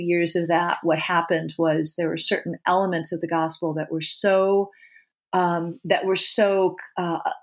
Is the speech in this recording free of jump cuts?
yes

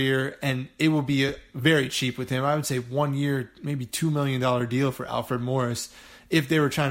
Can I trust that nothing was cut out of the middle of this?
yes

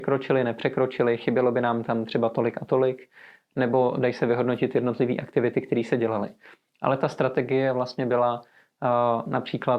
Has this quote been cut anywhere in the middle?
no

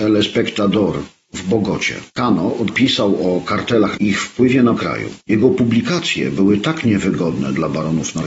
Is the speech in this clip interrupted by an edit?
yes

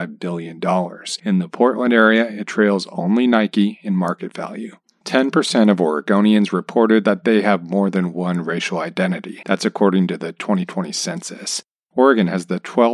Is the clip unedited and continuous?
yes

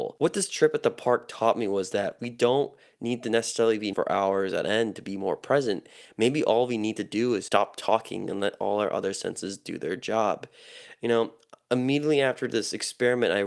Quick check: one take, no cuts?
no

